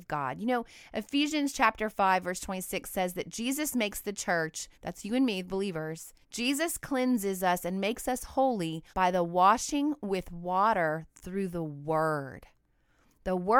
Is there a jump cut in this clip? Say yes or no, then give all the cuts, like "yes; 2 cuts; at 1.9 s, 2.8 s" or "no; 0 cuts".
yes; 3 cuts; at 4.7 s, 6.2 s, 8.9 s